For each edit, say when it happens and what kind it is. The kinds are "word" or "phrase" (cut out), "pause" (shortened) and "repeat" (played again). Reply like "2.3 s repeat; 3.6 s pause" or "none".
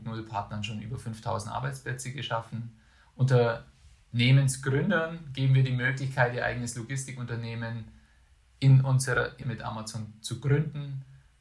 9.4 s word